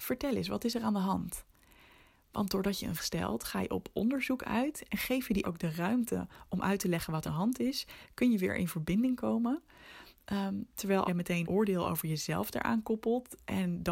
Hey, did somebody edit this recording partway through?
yes; 5 cuts; at 3.0 s, 5.4 s, 7.3 s, 11.1 s, 11.4 s

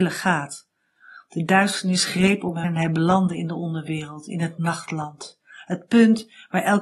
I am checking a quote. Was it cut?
yes; 1 cut; at 2.6 s

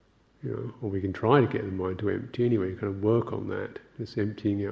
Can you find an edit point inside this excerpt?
no; 0 cuts

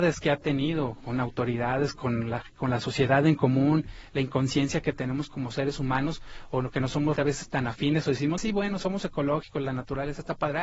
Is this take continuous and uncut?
no; 2 cuts; at 7.2 s, 8.4 s

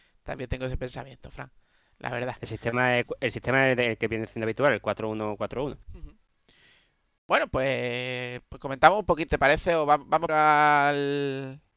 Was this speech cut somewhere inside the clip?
yes; 4 cuts; at 5.8 s, 8.4 s, 9.3 s, 10.3 s

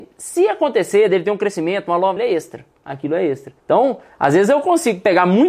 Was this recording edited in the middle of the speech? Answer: yes; 3 cuts; at 2.2 s, 2.7 s, 3.6 s

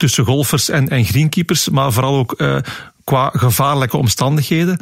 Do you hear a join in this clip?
no; 0 cuts

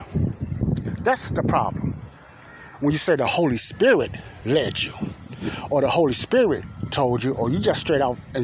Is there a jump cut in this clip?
no; 0 cuts

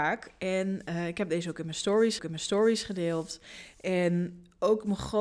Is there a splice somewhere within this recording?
yes; 1 cut; at 2.2 s

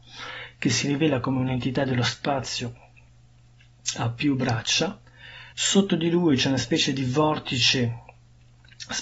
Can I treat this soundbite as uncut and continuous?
no; 1 cut; at 5.5 s

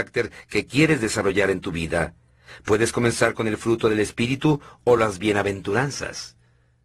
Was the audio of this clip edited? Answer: no; 0 cuts

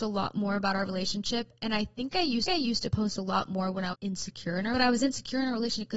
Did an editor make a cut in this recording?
yes; 3 cuts; at 2.5 s, 3.9 s, 4.7 s

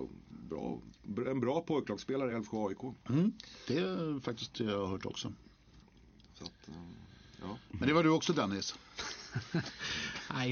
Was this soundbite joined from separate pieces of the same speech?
no; 0 cuts

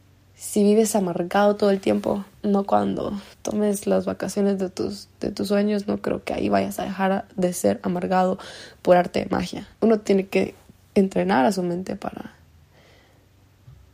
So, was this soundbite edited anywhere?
yes; 3 cuts; at 3.3 s, 9.7 s, 10.7 s

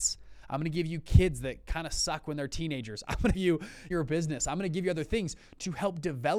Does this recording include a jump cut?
yes; 2 cuts; at 3.3 s, 3.9 s

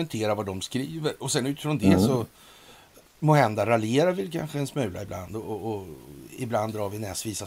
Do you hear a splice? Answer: no; 0 cuts

